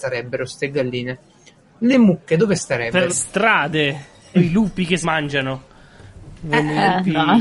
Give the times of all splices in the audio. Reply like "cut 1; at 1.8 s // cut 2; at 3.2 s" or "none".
cut 1; at 3.1 s // cut 2; at 4.4 s // cut 3; at 5.0 s